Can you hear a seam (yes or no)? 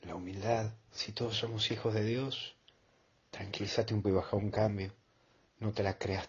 yes